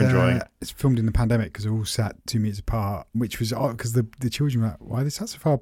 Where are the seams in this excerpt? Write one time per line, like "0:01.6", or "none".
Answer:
0:02.2